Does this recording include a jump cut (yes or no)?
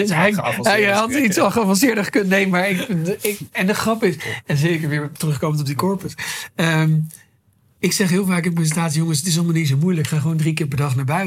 no